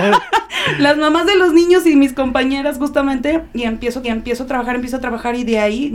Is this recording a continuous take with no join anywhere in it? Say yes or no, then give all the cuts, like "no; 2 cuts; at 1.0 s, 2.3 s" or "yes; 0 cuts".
no; 1 cut; at 4.0 s